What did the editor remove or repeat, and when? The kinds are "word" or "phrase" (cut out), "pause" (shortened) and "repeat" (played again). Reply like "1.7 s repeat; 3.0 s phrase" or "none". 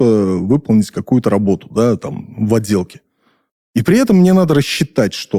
none